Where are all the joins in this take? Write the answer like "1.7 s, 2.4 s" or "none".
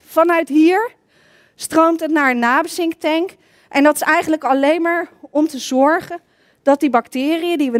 none